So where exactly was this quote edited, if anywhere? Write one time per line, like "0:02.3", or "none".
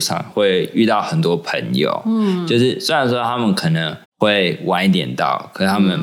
0:04.1